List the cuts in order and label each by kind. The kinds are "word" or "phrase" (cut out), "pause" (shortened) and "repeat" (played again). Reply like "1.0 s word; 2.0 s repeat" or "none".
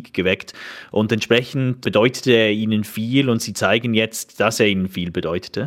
none